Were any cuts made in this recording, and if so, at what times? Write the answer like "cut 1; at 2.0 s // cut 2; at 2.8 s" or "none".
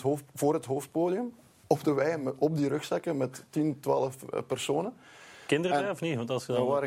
none